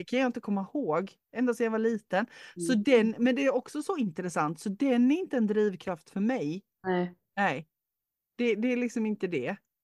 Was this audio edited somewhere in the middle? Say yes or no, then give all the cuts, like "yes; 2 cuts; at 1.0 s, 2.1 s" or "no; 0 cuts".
no; 0 cuts